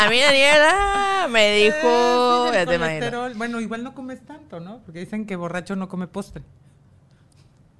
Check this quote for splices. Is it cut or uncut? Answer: uncut